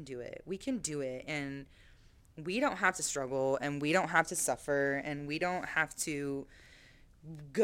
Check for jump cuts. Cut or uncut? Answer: uncut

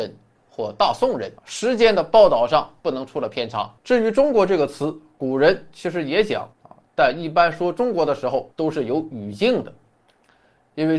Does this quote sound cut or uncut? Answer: cut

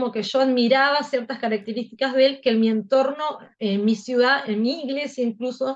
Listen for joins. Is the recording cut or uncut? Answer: cut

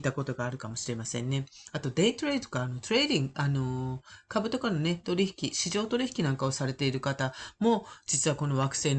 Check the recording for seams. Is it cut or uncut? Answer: uncut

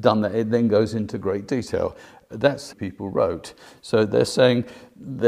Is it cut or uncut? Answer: cut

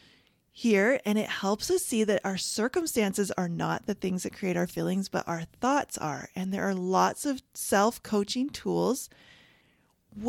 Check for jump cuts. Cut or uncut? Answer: uncut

